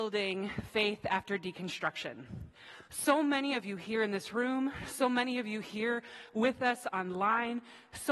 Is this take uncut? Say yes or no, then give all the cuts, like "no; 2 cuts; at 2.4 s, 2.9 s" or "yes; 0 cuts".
no; 1 cut; at 2.9 s